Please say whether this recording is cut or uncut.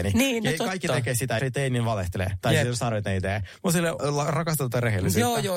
cut